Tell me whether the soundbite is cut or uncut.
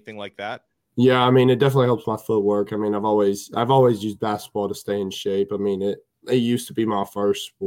uncut